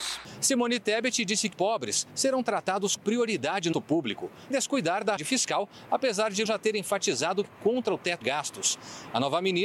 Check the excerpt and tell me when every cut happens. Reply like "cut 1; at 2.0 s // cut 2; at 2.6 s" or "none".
cut 1; at 1.5 s // cut 2; at 3.0 s // cut 3; at 3.7 s // cut 4; at 4.5 s // cut 5; at 5.2 s // cut 6; at 6.5 s // cut 7; at 7.4 s // cut 8; at 8.2 s

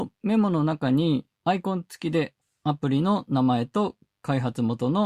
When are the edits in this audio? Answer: cut 1; at 1.3 s // cut 2; at 2.4 s

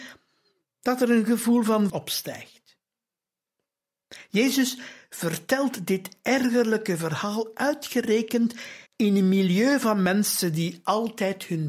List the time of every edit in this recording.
cut 1; at 1.9 s // cut 2; at 8.9 s

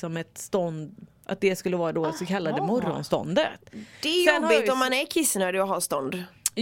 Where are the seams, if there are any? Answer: cut 1; at 3.9 s

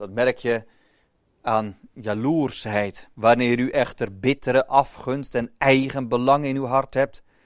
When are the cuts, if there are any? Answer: cut 1; at 3.1 s

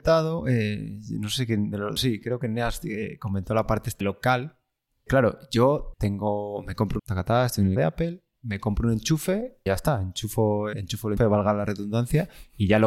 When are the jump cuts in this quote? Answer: cut 1; at 2.0 s // cut 2; at 4.0 s // cut 3; at 5.1 s // cut 4; at 5.9 s // cut 5; at 7.0 s // cut 6; at 7.8 s // cut 7; at 9.7 s // cut 8; at 10.7 s // cut 9; at 11.2 s

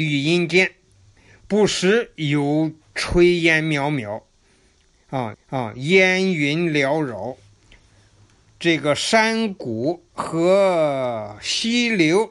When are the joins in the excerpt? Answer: cut 1; at 5.3 s

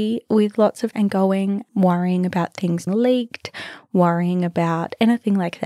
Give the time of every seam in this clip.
cut 1; at 0.9 s // cut 2; at 2.9 s

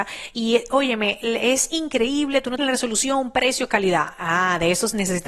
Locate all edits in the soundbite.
cut 1; at 2.6 s

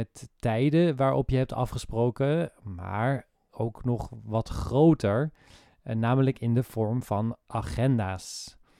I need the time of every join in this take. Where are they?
none

